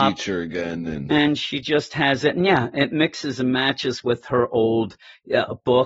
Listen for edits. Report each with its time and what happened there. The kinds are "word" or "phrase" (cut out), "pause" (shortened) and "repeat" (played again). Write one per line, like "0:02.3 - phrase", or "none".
none